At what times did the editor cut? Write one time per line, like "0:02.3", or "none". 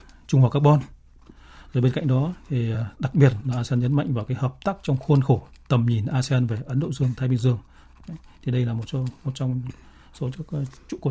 none